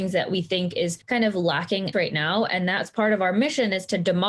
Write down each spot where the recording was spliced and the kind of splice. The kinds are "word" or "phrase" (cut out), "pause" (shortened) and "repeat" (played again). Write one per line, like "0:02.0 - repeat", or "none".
0:01.0 - pause
0:01.9 - word